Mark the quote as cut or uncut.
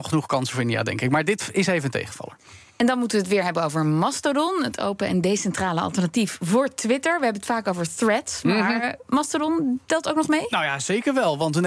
uncut